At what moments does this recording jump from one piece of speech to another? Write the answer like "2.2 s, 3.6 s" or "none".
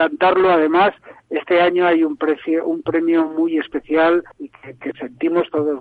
4.3 s

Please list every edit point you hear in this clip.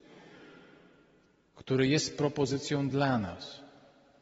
none

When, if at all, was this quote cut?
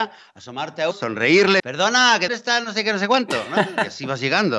0.9 s, 1.6 s, 2.3 s

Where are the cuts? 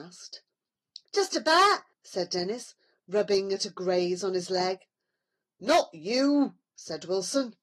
1.9 s

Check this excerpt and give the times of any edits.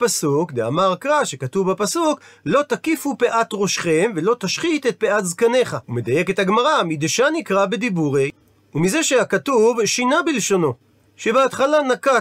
5.8 s

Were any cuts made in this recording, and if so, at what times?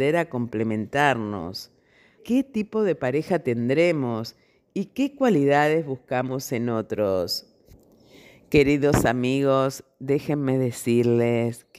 2.2 s

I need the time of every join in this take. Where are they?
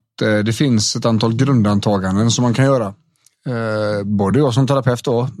none

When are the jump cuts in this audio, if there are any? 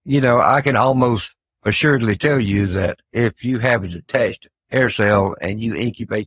3.0 s

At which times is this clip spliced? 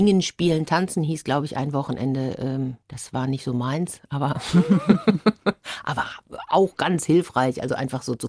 2.8 s

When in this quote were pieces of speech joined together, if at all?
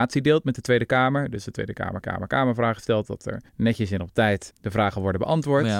1.5 s, 2.0 s, 3.5 s, 4.5 s

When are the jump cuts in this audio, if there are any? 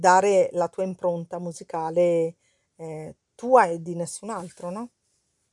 none

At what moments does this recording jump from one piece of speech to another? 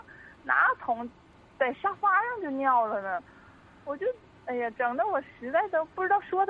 none

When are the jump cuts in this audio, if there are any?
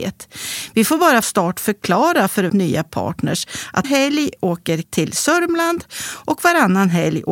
1.2 s, 2.5 s, 3.8 s, 4.8 s

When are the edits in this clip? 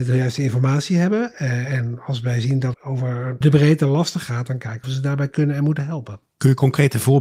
2.7 s, 3.4 s, 4.8 s

